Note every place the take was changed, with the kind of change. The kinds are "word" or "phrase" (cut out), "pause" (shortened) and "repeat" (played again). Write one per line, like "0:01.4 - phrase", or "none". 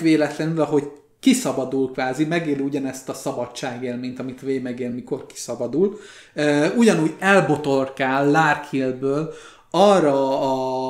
none